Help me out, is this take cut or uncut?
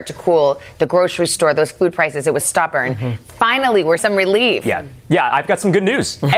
cut